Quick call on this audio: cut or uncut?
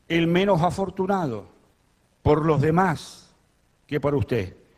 uncut